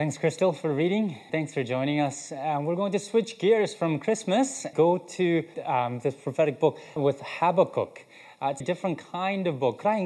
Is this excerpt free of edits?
no; 5 cuts; at 1.3 s, 4.7 s, 5.5 s, 7.0 s, 8.6 s

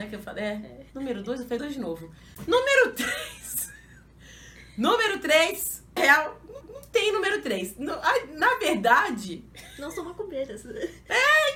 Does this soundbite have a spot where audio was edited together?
yes; 4 cuts; at 0.9 s, 1.6 s, 6.0 s, 6.6 s

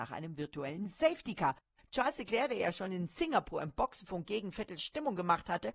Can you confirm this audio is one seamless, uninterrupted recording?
yes; 0 cuts

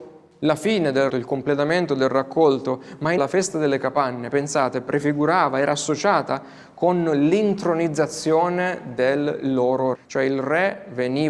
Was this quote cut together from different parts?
yes; 3 cuts; at 1.1 s, 3.2 s, 9.9 s

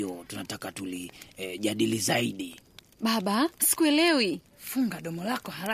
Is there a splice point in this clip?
yes; 1 cut; at 3.6 s

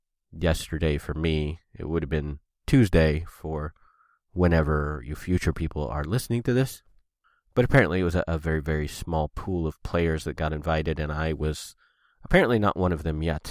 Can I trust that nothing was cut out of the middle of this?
yes; 0 cuts

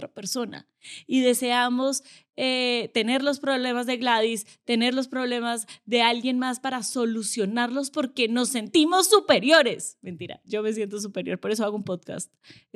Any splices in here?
no; 0 cuts

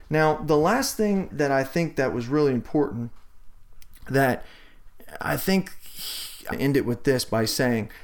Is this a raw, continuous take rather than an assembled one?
no; 2 cuts; at 1.3 s, 6.5 s

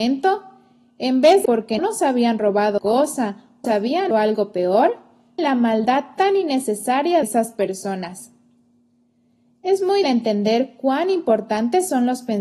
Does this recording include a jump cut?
yes; 8 cuts; at 1.4 s, 1.8 s, 2.8 s, 3.6 s, 4.1 s, 5.4 s, 7.2 s, 10.0 s

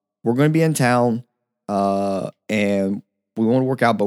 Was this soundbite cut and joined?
no; 0 cuts

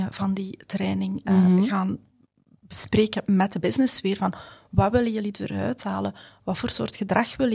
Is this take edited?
no; 0 cuts

